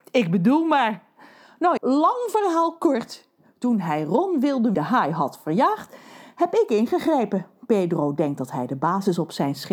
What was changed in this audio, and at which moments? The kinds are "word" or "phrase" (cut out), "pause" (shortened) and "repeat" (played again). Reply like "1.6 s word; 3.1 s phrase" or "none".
1.8 s word; 4.7 s phrase